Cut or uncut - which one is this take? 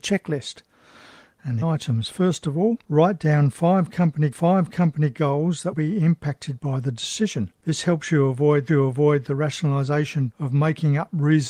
cut